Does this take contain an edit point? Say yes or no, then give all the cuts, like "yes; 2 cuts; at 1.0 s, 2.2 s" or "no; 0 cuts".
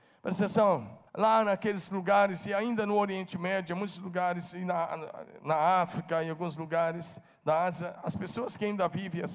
yes; 1 cut; at 1.1 s